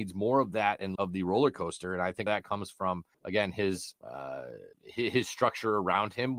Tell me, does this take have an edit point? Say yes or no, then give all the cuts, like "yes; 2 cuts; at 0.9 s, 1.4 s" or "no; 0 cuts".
yes; 5 cuts; at 1.0 s, 2.3 s, 3.1 s, 4.0 s, 4.7 s